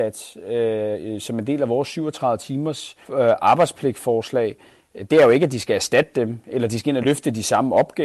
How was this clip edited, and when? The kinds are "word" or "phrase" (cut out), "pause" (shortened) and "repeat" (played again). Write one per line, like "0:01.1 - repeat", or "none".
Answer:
0:03.0 - pause